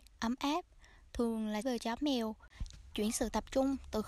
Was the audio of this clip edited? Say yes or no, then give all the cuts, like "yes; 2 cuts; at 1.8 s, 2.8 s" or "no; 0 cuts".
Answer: yes; 2 cuts; at 1.6 s, 2.9 s